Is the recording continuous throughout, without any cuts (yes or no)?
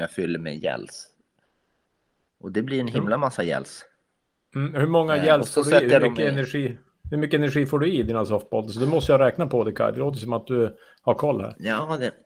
yes